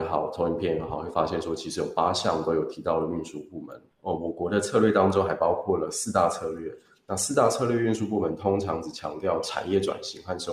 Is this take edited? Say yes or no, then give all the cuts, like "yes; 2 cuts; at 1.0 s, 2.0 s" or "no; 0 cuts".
no; 0 cuts